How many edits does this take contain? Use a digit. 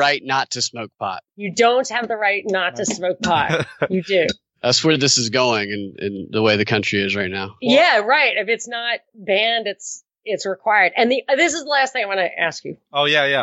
1